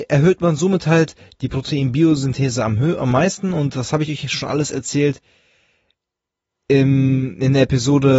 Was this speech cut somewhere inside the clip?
no; 0 cuts

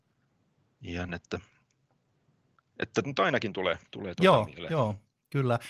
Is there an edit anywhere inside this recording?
yes; 3 cuts; at 1.1 s, 3.0 s, 3.9 s

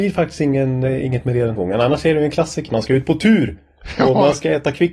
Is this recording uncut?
no; 2 cuts; at 1.6 s, 2.7 s

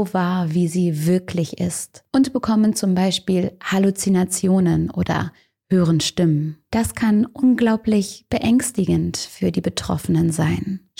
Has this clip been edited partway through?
no; 0 cuts

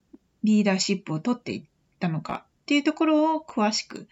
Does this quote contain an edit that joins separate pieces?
no; 0 cuts

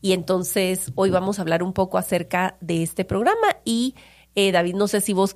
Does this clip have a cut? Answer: no; 0 cuts

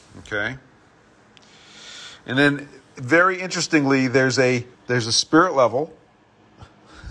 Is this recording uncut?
no; 1 cut; at 4.7 s

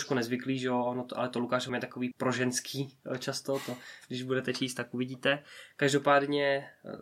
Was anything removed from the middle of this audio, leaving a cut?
yes; 2 cuts; at 1.7 s, 2.1 s

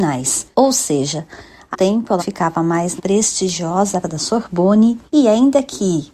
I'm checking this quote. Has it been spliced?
yes; 5 cuts; at 1.7 s, 2.2 s, 3.0 s, 4.0 s, 5.1 s

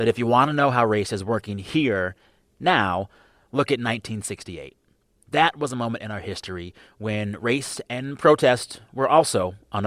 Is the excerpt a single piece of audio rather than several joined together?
yes; 0 cuts

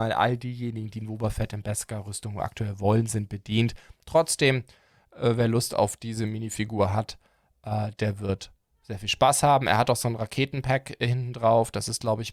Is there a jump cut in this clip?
no; 0 cuts

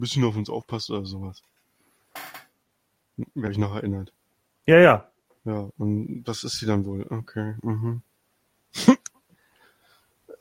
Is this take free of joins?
no; 1 cut; at 3.5 s

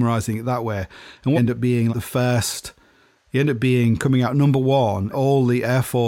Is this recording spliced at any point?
yes; 3 cuts; at 1.3 s, 1.9 s, 5.1 s

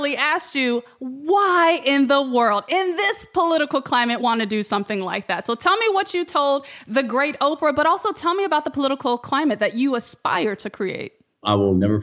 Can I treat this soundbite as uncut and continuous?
no; 1 cut; at 4.2 s

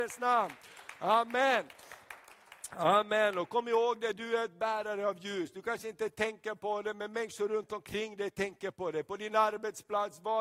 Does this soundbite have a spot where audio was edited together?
no; 0 cuts

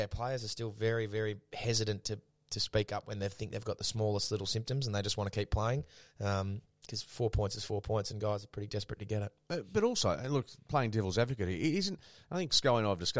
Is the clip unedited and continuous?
yes; 0 cuts

